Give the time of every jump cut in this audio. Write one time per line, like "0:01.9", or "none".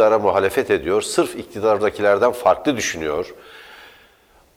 none